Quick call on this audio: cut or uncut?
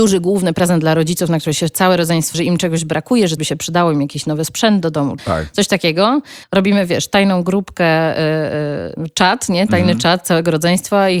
cut